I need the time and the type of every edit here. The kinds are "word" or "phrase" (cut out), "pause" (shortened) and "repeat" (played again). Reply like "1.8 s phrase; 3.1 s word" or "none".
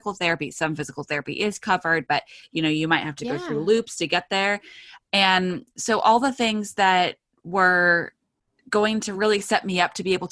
none

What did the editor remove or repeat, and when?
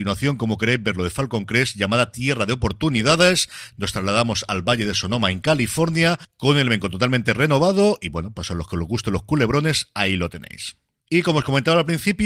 none

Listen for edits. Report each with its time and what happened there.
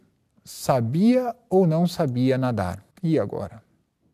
2.9 s pause

